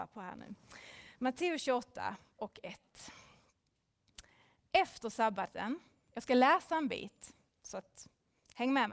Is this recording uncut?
yes; 0 cuts

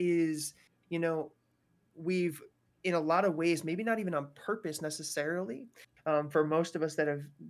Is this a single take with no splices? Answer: no; 1 cut; at 1.6 s

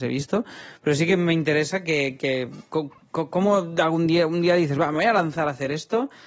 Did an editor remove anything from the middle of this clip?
no; 0 cuts

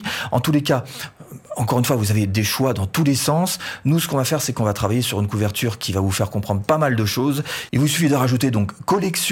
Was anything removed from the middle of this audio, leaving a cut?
no; 0 cuts

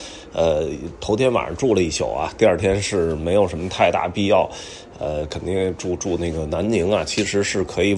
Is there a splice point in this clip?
no; 0 cuts

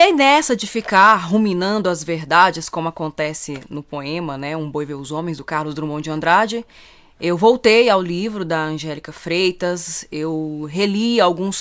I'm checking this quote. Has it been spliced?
no; 0 cuts

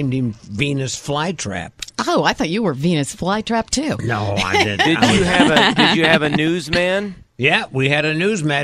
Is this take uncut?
yes; 0 cuts

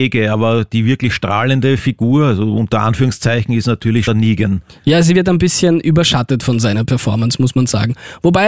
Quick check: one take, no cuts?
no; 1 cut; at 4.1 s

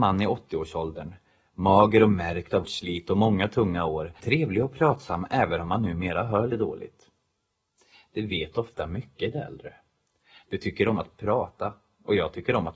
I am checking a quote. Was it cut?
yes; 3 cuts; at 2.6 s, 4.2 s, 6.5 s

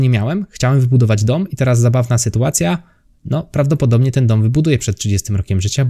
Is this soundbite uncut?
yes; 0 cuts

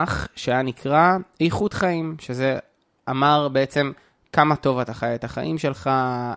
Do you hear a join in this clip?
no; 0 cuts

